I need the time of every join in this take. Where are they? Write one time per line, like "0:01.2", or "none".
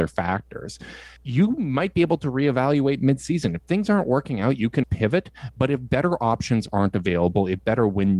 0:01.2
0:04.8

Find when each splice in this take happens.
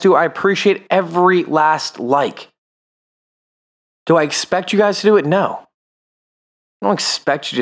none

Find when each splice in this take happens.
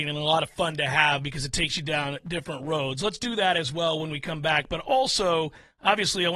none

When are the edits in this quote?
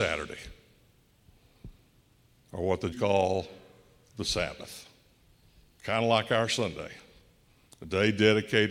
0:02.9
0:05.1

